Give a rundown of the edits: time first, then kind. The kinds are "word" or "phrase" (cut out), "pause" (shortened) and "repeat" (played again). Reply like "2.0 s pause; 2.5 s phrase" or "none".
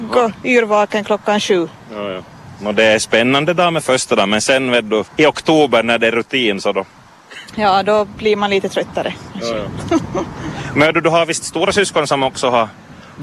5.1 s pause